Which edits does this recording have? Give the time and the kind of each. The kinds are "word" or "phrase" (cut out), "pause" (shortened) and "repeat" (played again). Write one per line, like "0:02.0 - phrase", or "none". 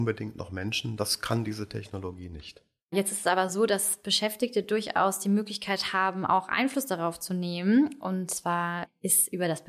none